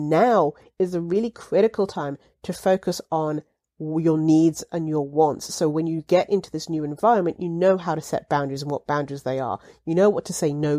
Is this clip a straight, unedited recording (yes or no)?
yes